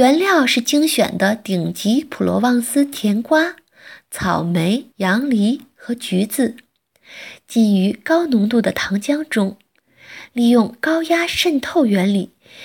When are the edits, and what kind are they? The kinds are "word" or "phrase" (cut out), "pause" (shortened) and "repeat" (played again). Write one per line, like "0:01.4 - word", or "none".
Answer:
0:04.9 - pause